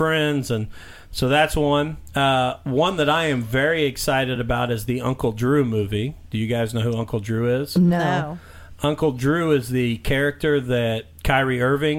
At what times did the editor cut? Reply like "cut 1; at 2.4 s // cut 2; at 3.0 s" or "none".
none